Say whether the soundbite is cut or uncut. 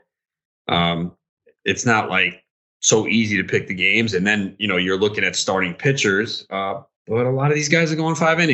uncut